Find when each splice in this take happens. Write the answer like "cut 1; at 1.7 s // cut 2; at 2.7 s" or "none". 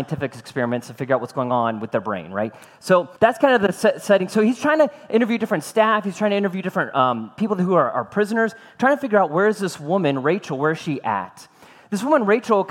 cut 1; at 3.2 s